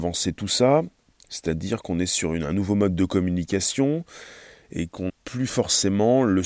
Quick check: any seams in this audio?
yes; 1 cut; at 5.1 s

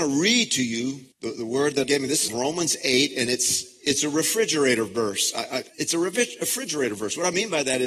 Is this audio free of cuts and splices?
no; 4 cuts; at 1.1 s, 1.8 s, 2.3 s, 5.7 s

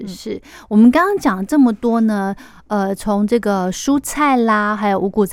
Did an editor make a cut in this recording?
no; 0 cuts

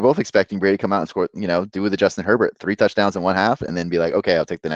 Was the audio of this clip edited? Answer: no; 0 cuts

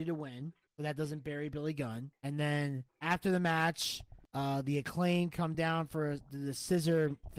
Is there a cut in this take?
no; 0 cuts

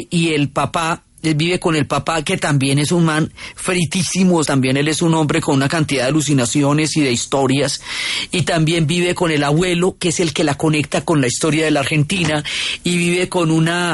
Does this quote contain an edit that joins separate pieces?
yes; 1 cut; at 4.5 s

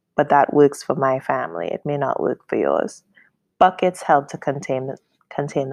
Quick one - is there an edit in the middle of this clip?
no; 0 cuts

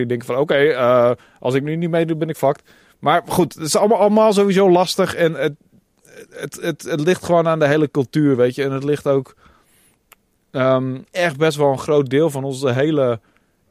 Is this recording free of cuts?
no; 1 cut; at 11.1 s

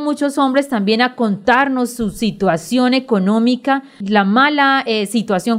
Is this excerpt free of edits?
no; 1 cut; at 4.0 s

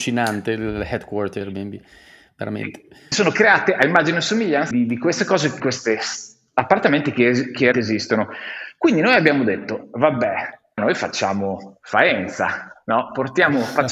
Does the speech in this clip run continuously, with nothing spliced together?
no; 6 cuts; at 1.4 s, 3.1 s, 4.7 s, 5.6 s, 7.7 s, 10.8 s

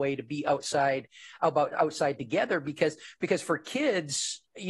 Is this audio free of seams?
yes; 0 cuts

